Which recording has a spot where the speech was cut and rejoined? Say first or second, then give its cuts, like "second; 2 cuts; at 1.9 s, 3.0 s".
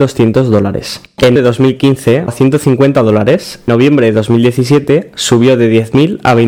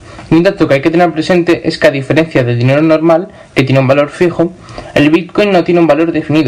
first; 3 cuts; at 1.4 s, 2.3 s, 3.7 s